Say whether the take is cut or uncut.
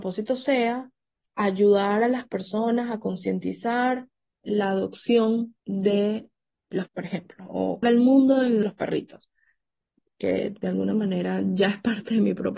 cut